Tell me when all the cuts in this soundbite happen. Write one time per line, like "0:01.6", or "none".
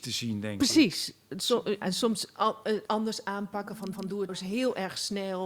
0:01.8
0:02.9
0:03.9
0:04.3